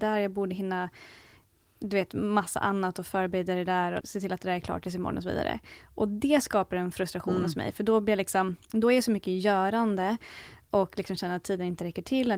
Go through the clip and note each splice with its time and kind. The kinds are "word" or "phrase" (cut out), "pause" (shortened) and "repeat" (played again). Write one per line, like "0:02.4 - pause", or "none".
0:04.0 - word